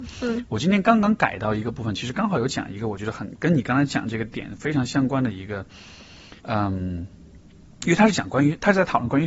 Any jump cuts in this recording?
yes; 1 cut; at 6.4 s

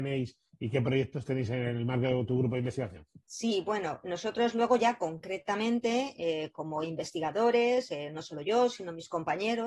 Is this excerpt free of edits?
no; 1 cut; at 3.2 s

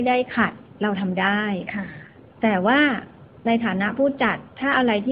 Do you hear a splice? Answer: no; 0 cuts

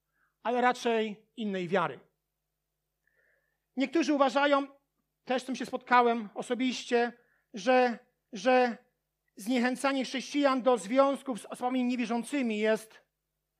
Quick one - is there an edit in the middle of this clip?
yes; 1 cut; at 8.3 s

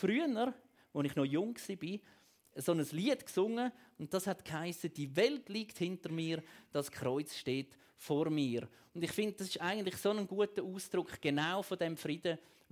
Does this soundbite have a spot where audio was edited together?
no; 0 cuts

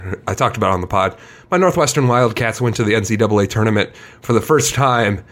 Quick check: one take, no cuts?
yes; 0 cuts

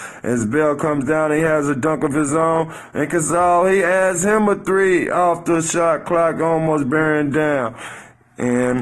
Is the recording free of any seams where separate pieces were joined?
yes; 0 cuts

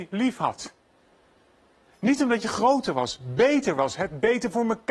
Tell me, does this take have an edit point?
no; 0 cuts

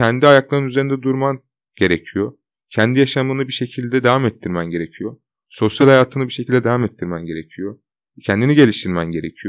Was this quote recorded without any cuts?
yes; 0 cuts

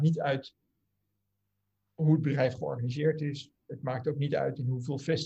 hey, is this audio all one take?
yes; 0 cuts

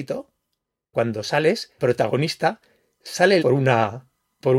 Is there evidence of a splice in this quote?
yes; 3 cuts; at 0.9 s, 1.8 s, 3.4 s

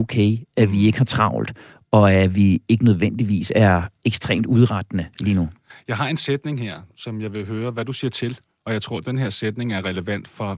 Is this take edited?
no; 0 cuts

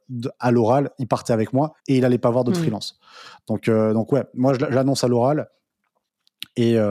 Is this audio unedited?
no; 1 cut; at 1.8 s

